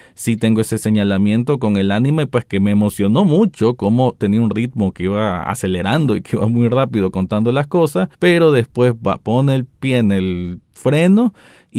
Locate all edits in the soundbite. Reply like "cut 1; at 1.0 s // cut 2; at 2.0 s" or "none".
cut 1; at 8.1 s

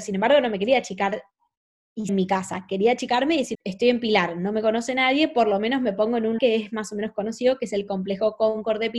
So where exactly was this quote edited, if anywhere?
cut 1; at 2.1 s // cut 2; at 3.5 s // cut 3; at 6.4 s

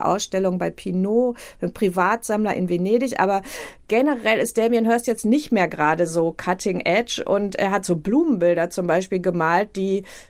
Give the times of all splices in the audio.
none

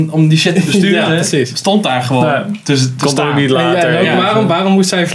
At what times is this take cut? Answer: none

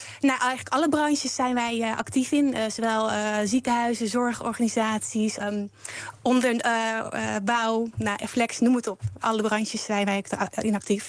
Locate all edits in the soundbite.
cut 1; at 5.4 s

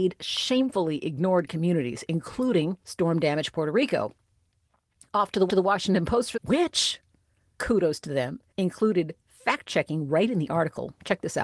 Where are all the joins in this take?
cut 1; at 2.8 s // cut 2; at 5.5 s // cut 3; at 6.3 s // cut 4; at 8.5 s

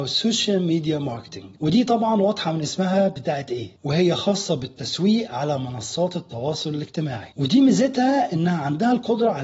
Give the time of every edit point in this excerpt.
none

